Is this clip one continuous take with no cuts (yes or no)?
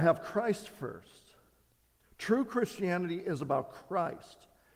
yes